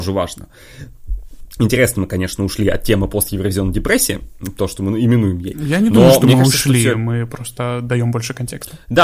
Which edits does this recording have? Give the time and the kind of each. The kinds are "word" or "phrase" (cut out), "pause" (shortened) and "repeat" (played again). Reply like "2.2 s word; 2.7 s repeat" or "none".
none